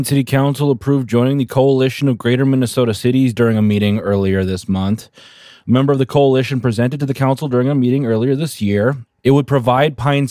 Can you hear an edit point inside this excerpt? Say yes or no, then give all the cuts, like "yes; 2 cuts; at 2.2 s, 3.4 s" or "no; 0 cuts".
no; 0 cuts